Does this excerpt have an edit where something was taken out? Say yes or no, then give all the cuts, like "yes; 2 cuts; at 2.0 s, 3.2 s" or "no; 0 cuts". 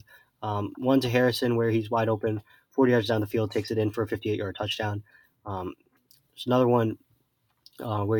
no; 0 cuts